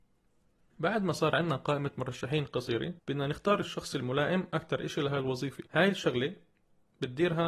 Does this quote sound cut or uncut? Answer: cut